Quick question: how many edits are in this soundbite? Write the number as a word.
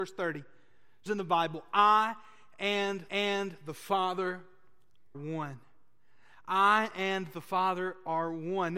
three